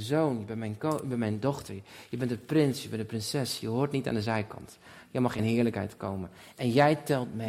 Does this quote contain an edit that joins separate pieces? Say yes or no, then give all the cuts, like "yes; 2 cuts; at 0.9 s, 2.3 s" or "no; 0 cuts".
yes; 1 cut; at 5.4 s